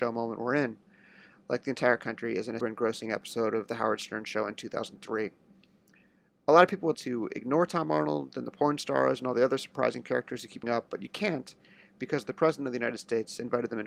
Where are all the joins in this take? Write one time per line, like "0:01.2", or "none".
0:02.6
0:06.9
0:10.6